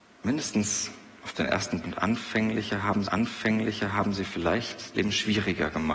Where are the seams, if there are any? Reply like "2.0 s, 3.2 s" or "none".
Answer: 1.8 s, 3.0 s, 4.9 s